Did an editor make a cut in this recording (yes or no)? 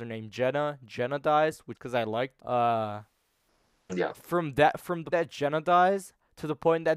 yes